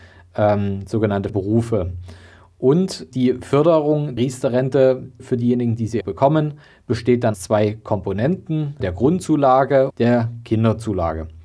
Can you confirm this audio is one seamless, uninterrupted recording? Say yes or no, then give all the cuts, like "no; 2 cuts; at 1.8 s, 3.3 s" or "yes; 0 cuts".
no; 8 cuts; at 1.3 s, 3.1 s, 4.2 s, 5.2 s, 6.0 s, 7.3 s, 8.8 s, 9.9 s